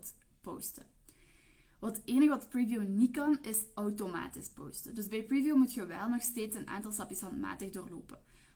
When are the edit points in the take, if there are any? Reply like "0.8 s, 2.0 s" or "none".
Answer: none

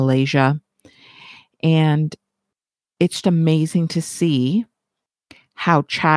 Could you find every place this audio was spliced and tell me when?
3.2 s

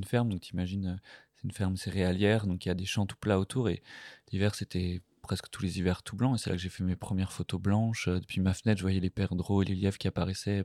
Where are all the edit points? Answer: none

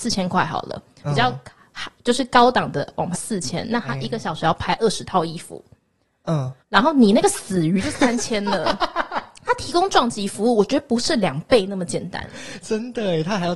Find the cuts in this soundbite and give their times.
3.1 s, 6.6 s

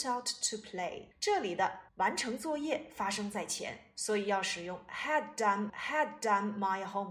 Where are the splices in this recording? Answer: 1.1 s, 1.9 s, 5.7 s

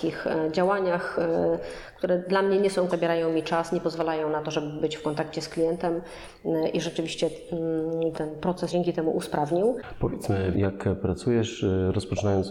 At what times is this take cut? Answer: 2.9 s, 8.1 s, 8.7 s, 10.5 s

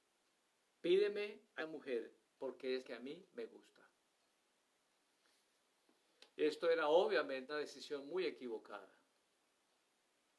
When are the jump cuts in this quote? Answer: 1.6 s, 2.3 s, 2.8 s, 6.3 s, 7.5 s

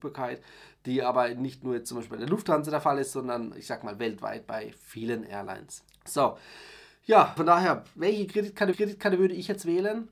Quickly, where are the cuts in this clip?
5.9 s, 7.4 s, 8.7 s

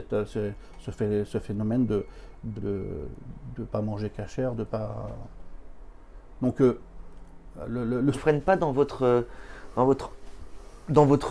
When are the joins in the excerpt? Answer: 2.6 s, 8.1 s

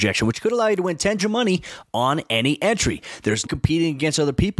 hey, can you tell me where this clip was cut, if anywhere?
1.2 s, 3.4 s

